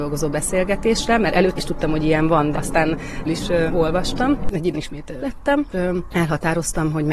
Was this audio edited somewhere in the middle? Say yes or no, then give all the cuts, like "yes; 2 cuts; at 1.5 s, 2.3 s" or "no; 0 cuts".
yes; 7 cuts; at 1.6 s, 2.5 s, 3.2 s, 3.7 s, 4.7 s, 5.2 s, 5.7 s